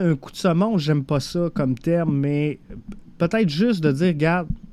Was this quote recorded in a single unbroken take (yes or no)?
yes